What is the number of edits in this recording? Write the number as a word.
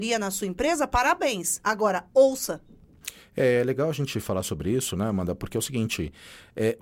zero